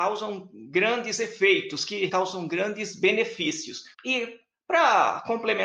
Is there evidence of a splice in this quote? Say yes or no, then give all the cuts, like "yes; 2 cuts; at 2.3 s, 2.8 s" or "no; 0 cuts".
yes; 2 cuts; at 2.1 s, 3.9 s